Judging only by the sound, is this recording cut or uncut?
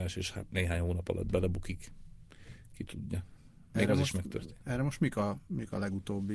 uncut